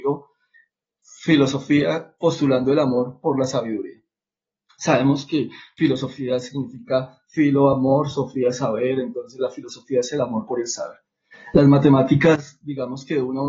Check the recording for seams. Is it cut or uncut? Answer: uncut